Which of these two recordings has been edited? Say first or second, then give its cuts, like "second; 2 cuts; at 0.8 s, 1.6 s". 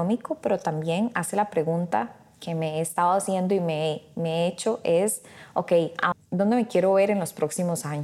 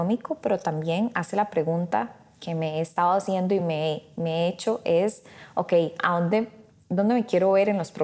first; 1 cut; at 6.1 s